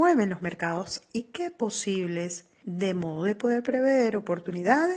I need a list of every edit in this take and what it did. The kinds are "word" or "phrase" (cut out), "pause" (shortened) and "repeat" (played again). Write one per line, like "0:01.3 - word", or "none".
0:01.1 - word
0:02.6 - phrase